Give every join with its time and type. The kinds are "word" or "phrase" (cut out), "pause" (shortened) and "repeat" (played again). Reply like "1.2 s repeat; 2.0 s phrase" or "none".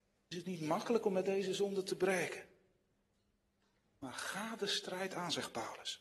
none